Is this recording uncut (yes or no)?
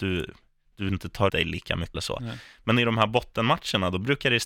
no